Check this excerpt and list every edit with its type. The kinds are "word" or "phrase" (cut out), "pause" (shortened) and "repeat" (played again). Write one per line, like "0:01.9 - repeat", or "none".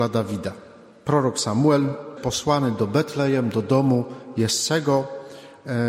0:02.2 - phrase